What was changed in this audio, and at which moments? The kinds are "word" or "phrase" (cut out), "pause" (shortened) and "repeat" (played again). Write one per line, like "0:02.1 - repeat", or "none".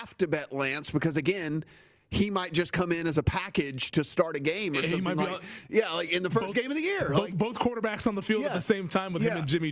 none